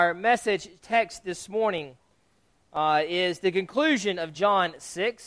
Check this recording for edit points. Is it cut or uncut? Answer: uncut